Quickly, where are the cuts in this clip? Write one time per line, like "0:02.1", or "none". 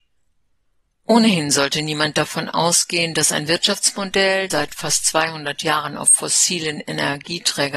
0:04.5

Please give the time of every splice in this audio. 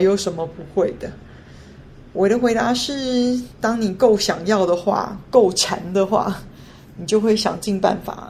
none

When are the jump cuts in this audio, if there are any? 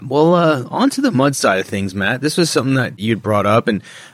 none

